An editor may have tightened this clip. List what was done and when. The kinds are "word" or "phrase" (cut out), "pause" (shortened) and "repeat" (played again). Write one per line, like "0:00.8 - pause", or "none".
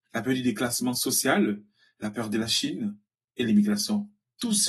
none